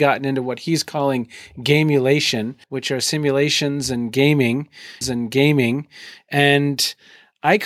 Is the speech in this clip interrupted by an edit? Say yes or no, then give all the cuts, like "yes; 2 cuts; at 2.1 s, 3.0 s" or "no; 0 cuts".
yes; 2 cuts; at 2.6 s, 5.0 s